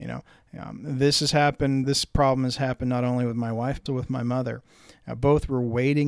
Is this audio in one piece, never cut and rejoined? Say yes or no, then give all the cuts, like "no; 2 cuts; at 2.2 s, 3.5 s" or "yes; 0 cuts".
no; 2 cuts; at 1.8 s, 3.9 s